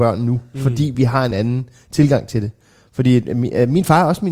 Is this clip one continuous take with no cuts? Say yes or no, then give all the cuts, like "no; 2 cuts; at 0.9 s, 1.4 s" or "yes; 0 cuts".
yes; 0 cuts